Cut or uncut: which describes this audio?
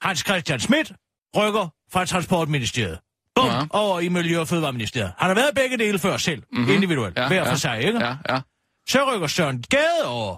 cut